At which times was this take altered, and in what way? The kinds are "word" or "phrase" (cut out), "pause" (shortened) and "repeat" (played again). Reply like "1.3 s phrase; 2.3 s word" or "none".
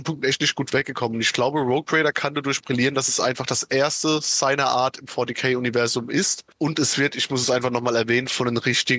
none